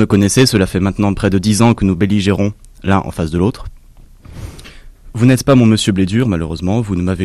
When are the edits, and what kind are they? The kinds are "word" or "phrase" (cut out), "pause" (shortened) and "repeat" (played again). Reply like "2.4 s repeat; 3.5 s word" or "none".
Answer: none